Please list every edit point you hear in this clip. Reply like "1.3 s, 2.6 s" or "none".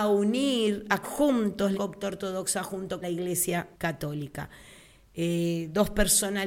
1.0 s, 1.7 s, 3.0 s, 3.7 s